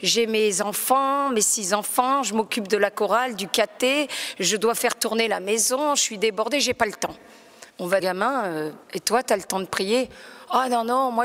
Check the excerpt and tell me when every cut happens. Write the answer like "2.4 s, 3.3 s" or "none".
7.7 s, 8.0 s, 8.8 s